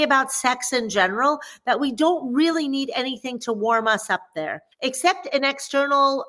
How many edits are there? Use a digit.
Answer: 1